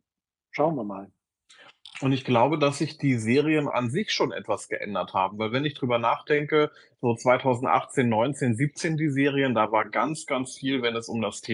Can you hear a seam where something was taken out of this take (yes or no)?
yes